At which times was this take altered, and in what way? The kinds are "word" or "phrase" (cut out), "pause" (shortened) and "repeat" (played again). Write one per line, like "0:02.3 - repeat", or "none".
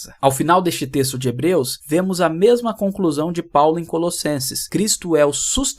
none